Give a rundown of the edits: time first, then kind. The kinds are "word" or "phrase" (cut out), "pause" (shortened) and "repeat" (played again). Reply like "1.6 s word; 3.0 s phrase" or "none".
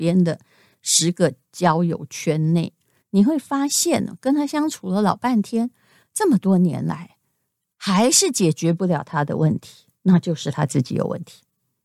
none